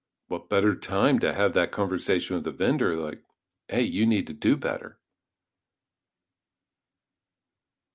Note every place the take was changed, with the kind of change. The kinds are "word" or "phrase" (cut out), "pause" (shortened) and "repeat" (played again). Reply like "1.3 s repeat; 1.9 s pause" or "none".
none